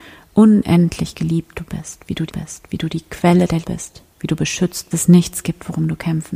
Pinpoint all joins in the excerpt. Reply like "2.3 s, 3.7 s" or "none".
2.3 s, 3.6 s, 4.1 s, 4.9 s